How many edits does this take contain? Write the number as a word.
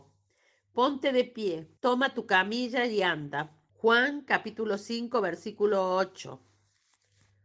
two